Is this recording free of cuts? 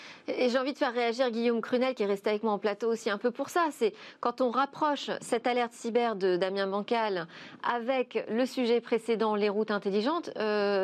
yes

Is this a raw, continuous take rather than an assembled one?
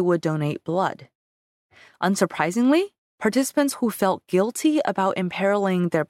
yes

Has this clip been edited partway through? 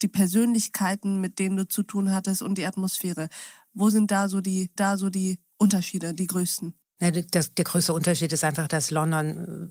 yes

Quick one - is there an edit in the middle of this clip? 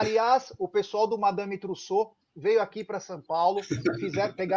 no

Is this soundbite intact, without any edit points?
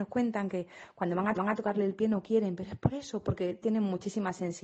no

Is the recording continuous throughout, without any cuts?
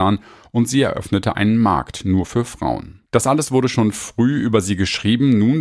no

